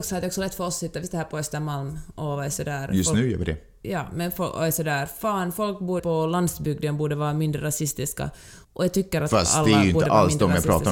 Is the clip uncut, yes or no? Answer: no